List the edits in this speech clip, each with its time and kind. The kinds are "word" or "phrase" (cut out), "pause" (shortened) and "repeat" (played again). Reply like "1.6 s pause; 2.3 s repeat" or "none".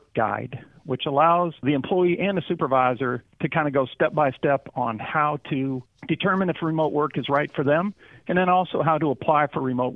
none